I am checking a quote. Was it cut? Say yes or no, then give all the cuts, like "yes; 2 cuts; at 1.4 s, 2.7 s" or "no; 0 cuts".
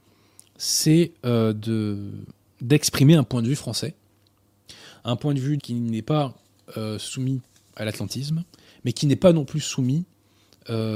yes; 1 cut; at 5.6 s